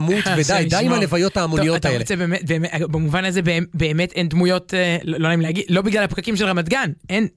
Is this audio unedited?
yes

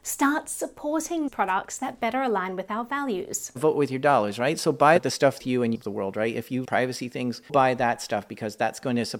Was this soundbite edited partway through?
yes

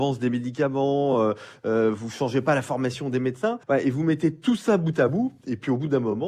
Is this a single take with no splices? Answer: no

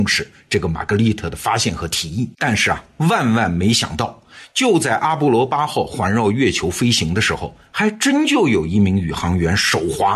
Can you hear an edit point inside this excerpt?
yes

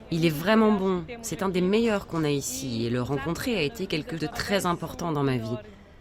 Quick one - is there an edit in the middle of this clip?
yes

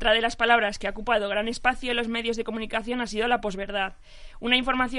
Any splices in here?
no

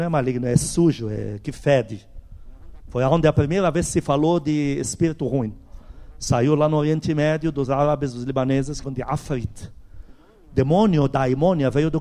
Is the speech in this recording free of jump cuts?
no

